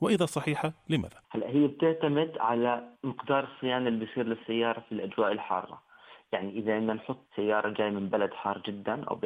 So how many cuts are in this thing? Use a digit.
3